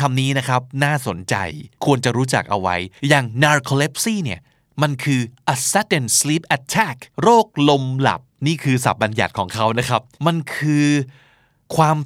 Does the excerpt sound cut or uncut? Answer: cut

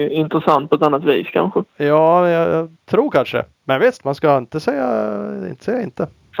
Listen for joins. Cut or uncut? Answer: cut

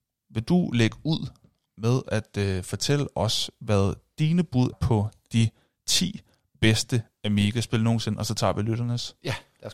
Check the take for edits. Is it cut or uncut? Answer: cut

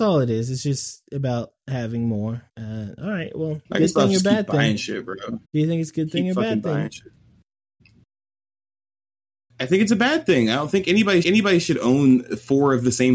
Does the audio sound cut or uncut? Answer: cut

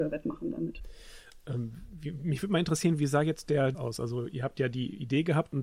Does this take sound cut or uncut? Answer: cut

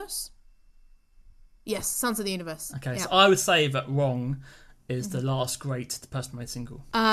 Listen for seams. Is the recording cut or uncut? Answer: uncut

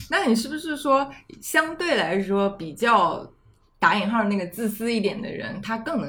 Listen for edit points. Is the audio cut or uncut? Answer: uncut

